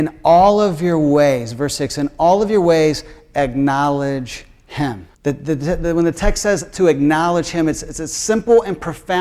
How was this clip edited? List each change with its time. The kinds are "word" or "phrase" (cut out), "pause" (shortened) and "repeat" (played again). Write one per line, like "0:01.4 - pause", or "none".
0:05.1 - pause